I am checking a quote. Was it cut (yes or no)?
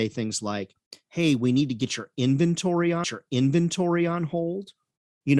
yes